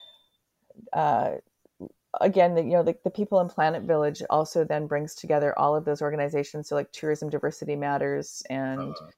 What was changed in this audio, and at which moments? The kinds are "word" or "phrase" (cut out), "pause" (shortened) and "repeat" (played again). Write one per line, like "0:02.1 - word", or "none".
none

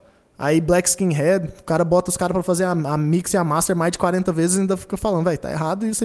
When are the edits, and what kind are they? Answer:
none

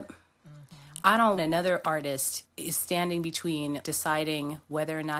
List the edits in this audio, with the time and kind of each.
0:01.4 - word
0:02.5 - word
0:03.8 - word

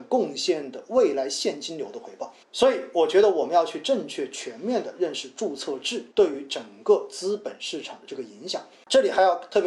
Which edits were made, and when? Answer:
0:02.4 - pause
0:06.1 - pause

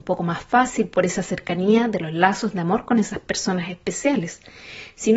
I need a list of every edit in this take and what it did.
none

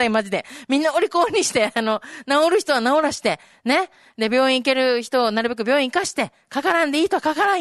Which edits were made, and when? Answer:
none

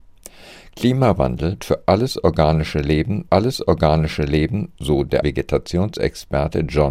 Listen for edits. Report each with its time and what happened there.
0:01.6 - word
0:03.3 - repeat
0:05.2 - word

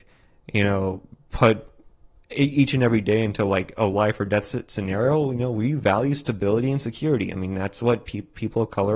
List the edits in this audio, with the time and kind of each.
none

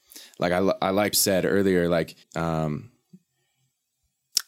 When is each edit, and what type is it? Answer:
0:01.1 - phrase
0:02.2 - pause

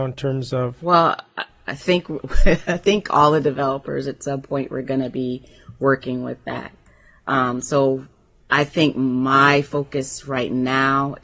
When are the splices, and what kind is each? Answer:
none

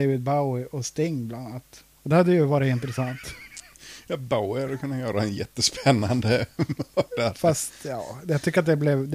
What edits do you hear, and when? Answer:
0:01.9 - pause

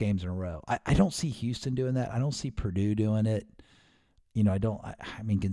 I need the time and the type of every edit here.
none

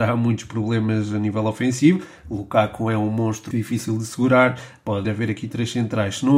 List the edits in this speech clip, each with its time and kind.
0:03.5 - word
0:05.0 - word

